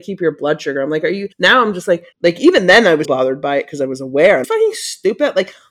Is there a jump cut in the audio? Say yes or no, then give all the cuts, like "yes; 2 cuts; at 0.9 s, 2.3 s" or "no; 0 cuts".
yes; 4 cuts; at 1.3 s, 2.1 s, 3.0 s, 4.4 s